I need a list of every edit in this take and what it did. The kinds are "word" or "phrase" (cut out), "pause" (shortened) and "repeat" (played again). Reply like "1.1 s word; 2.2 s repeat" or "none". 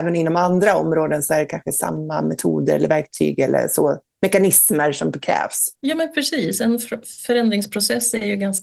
5.8 s pause